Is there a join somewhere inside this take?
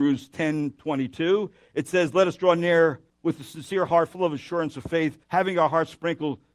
yes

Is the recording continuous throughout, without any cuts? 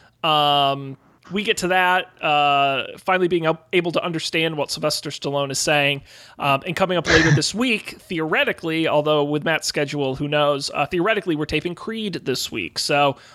yes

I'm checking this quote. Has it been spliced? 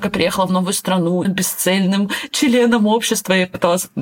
yes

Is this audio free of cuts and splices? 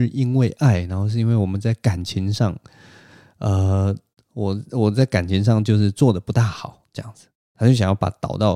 yes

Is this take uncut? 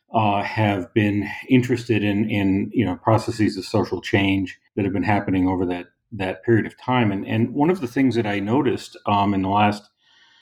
no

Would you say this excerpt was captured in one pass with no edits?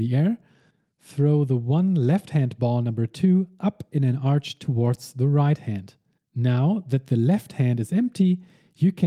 no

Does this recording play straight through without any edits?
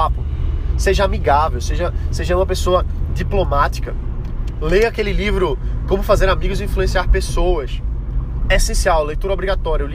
yes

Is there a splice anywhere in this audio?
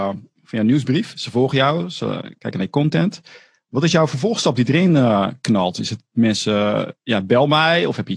no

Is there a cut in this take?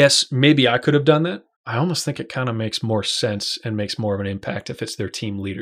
yes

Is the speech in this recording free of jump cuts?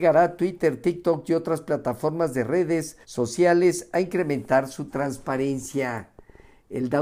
no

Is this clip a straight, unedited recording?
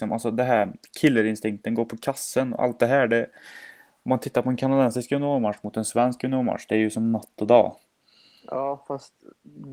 yes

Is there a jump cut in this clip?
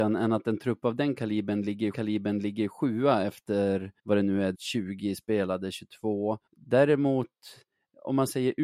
yes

